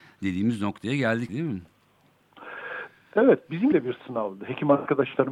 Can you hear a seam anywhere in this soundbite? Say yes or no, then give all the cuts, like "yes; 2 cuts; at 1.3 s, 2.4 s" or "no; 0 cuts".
yes; 2 cuts; at 1.3 s, 3.7 s